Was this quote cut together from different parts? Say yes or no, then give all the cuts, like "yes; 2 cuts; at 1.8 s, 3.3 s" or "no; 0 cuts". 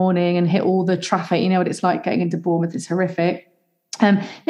no; 0 cuts